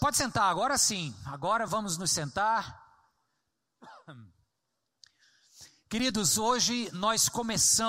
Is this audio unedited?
yes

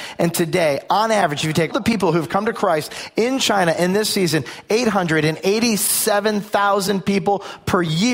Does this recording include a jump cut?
yes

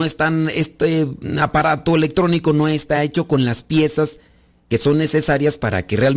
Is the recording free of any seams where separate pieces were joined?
yes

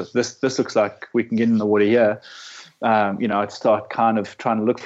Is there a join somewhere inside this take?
no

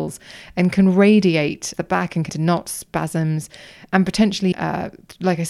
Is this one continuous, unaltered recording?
no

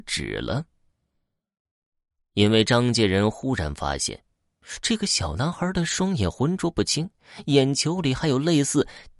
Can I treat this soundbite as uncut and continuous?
yes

